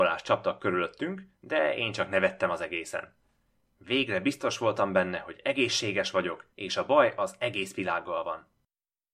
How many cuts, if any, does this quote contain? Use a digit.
1